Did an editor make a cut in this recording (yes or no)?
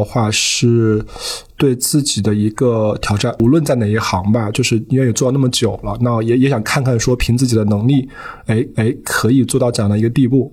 yes